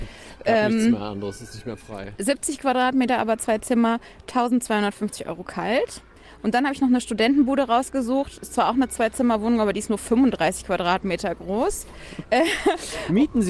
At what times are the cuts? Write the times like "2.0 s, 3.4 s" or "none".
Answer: none